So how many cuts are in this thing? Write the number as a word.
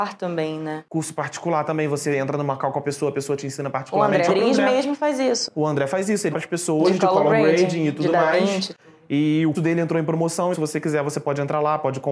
four